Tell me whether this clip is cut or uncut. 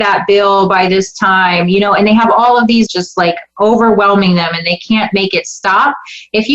cut